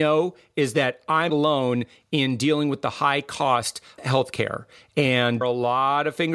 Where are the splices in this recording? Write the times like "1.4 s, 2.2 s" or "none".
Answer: 1.3 s, 4.0 s, 5.4 s